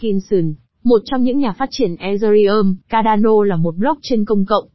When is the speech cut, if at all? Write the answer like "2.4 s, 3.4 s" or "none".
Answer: 2.8 s